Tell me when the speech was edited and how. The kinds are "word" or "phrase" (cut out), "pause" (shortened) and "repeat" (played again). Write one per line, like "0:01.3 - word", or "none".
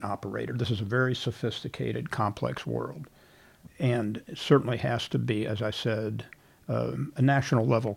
0:03.7 - word